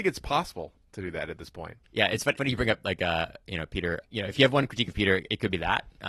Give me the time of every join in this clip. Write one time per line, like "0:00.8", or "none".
0:01.8
0:02.4
0:04.0